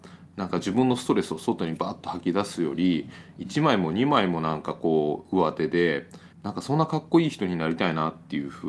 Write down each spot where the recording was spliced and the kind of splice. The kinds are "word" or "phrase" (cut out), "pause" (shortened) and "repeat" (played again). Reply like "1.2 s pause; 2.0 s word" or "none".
6.3 s pause